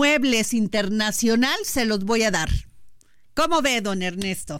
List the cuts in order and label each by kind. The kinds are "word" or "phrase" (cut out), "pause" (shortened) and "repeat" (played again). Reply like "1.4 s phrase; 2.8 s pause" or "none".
none